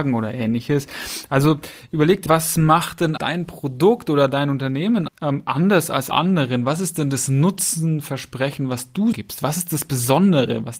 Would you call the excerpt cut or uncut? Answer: cut